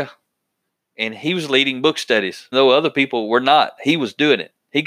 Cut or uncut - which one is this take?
cut